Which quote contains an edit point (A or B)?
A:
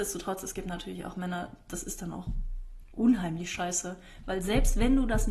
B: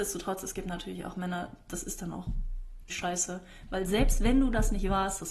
B